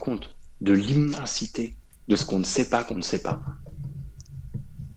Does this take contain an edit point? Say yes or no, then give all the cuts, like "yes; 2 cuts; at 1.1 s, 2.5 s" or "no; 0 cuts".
yes; 1 cut; at 1.8 s